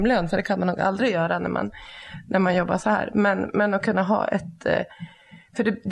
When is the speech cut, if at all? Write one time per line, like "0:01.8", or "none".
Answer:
none

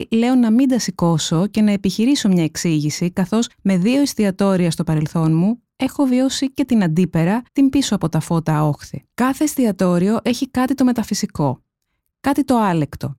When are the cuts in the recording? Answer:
0:03.5
0:07.5
0:09.1

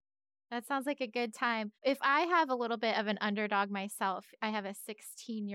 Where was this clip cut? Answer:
0:01.7

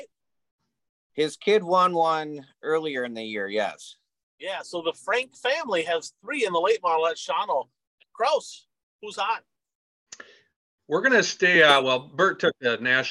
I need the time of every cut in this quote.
none

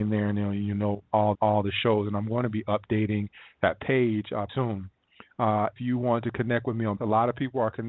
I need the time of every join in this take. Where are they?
0:01.3
0:04.5
0:05.8
0:07.0

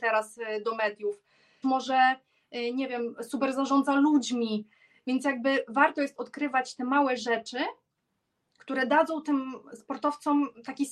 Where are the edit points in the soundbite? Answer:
0:01.6

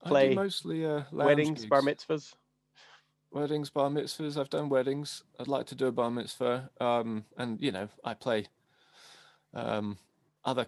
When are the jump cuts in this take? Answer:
none

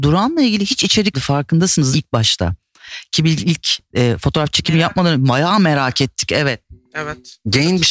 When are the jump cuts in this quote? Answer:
0:01.1
0:01.9
0:03.4

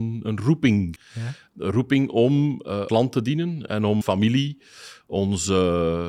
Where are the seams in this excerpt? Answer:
0:01.0
0:02.9
0:04.0

